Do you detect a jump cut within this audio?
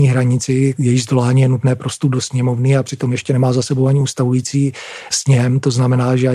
no; 0 cuts

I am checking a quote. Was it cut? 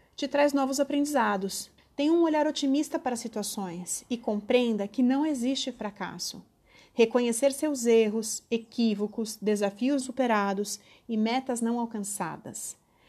yes; 2 cuts; at 1.8 s, 10.0 s

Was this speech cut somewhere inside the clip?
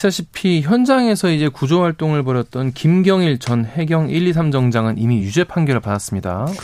no; 0 cuts

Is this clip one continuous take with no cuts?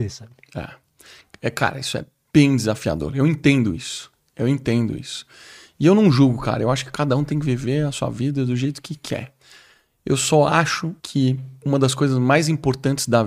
no; 1 cut; at 11.0 s

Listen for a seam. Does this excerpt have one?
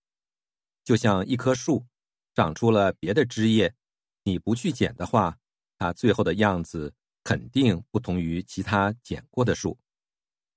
no; 0 cuts

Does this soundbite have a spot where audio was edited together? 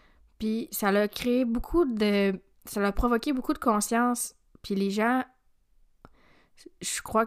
no; 0 cuts

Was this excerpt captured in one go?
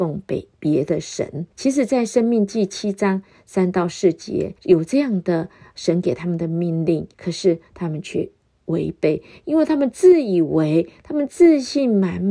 no; 3 cuts; at 1.5 s, 4.6 s, 7.1 s

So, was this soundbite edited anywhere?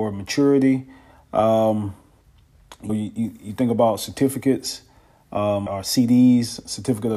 yes; 2 cuts; at 2.9 s, 5.7 s

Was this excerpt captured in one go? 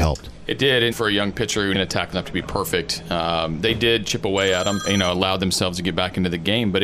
no; 3 cuts; at 0.9 s, 1.7 s, 2.1 s

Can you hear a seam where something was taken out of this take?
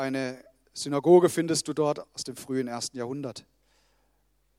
yes; 1 cut; at 2.1 s

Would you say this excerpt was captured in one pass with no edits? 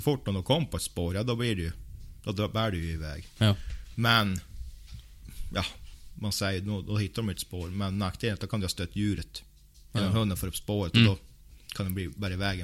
yes; 0 cuts

